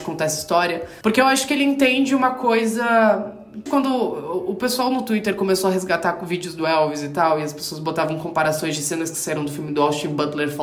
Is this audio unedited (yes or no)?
no